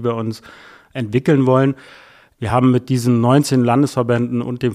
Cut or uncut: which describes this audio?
uncut